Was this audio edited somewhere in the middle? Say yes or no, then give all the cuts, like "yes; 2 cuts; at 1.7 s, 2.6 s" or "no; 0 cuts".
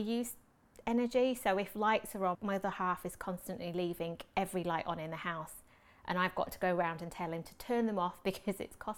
yes; 1 cut; at 2.3 s